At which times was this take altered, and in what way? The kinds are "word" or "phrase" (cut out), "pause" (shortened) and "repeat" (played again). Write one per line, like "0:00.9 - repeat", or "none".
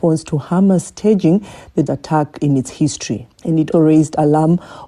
0:01.9 - word
0:03.3 - pause
0:03.7 - word